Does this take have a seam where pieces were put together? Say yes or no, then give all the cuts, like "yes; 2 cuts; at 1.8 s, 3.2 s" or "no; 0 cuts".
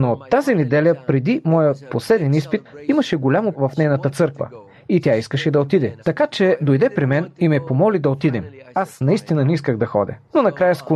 yes; 2 cuts; at 3.5 s, 6.0 s